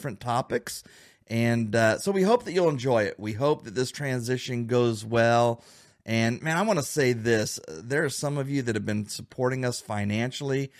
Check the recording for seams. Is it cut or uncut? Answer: uncut